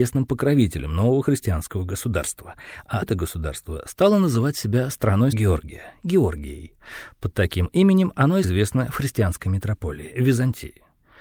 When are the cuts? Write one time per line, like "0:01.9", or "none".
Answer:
0:03.0
0:05.3
0:08.4